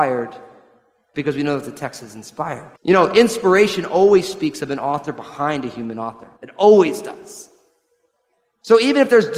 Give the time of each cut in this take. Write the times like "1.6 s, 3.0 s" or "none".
2.8 s, 6.4 s